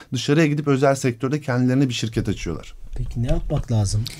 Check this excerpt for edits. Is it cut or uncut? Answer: uncut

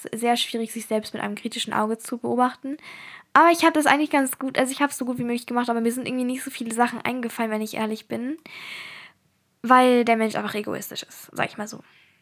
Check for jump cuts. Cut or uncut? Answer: uncut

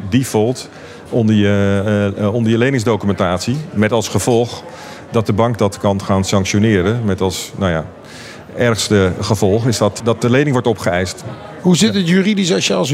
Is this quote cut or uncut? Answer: uncut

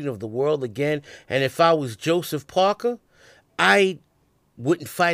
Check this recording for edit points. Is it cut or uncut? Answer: uncut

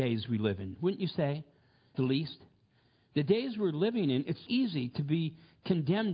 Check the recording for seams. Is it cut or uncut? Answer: cut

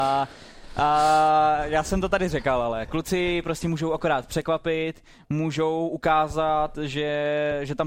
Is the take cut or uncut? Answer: uncut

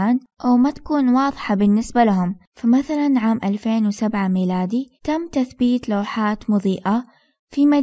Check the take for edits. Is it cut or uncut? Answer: cut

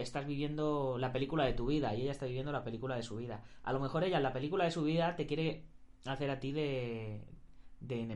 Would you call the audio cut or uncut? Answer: uncut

